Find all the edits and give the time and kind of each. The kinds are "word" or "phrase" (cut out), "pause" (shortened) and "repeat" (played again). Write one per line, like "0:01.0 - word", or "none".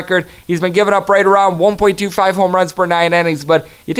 none